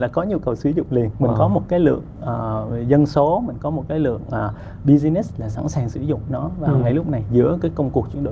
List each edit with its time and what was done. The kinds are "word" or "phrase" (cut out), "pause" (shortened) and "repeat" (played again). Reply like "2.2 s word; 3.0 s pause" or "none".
none